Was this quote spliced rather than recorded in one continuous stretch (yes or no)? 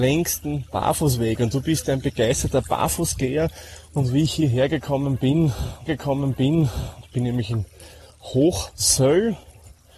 yes